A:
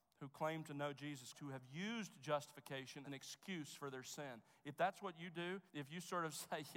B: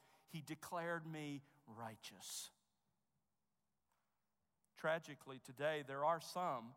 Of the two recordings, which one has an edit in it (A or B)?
A